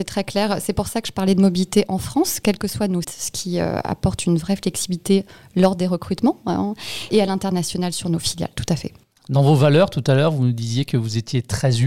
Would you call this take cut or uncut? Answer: cut